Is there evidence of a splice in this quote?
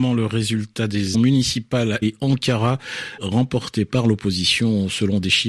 yes; 3 cuts; at 1.1 s, 2.0 s, 3.2 s

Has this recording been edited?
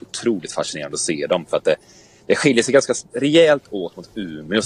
no; 0 cuts

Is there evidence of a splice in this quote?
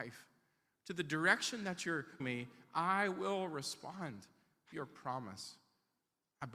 yes; 2 cuts; at 2.2 s, 4.7 s

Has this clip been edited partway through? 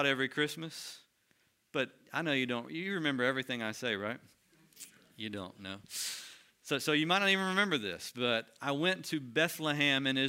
no; 0 cuts

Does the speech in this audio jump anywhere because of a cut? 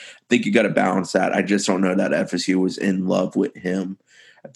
no; 0 cuts

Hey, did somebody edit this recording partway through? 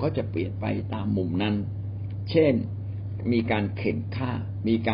no; 0 cuts

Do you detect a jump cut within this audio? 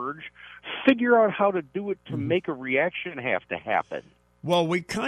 no; 0 cuts

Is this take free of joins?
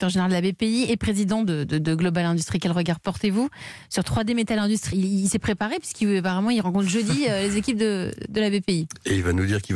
no; 1 cut; at 4.9 s

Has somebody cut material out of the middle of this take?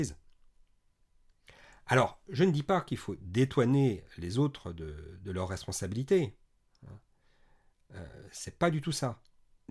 no; 0 cuts

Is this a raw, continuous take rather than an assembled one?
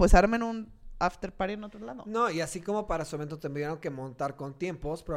yes; 0 cuts

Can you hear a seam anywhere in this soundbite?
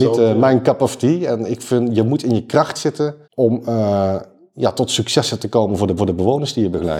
yes; 2 cuts; at 3.2 s, 6.0 s

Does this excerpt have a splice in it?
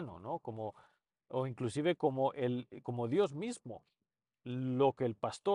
no; 0 cuts

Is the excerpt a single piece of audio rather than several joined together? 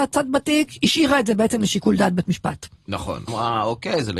no; 1 cut; at 3.3 s

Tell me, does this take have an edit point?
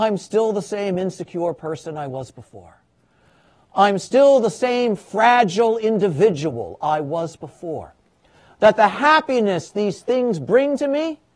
no; 0 cuts

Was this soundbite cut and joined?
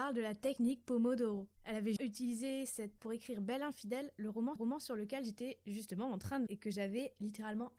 yes; 5 cuts; at 1.6 s, 2.0 s, 3.0 s, 4.6 s, 6.5 s

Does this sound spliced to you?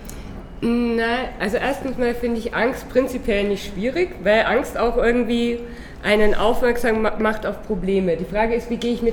no; 0 cuts

